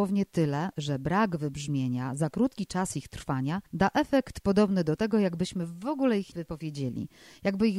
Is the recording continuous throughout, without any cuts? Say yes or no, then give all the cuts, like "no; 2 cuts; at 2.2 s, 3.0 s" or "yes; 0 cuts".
no; 2 cuts; at 3.7 s, 6.3 s